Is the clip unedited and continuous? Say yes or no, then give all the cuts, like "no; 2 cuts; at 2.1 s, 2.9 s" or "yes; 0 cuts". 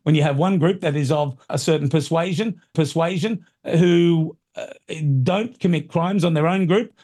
no; 2 cuts; at 1.5 s, 2.7 s